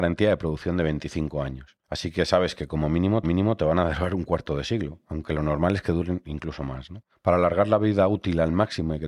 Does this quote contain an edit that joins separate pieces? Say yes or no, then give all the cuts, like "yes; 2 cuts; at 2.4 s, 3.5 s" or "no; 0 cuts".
yes; 3 cuts; at 1.8 s, 3.2 s, 7.1 s